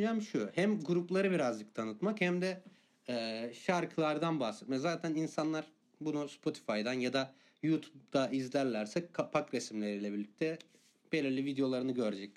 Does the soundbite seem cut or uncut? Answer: uncut